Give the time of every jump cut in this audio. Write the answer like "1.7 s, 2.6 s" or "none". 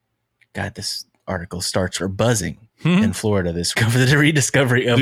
2.0 s, 2.7 s, 3.7 s